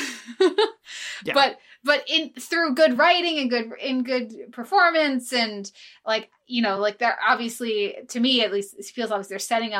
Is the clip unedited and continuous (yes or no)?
yes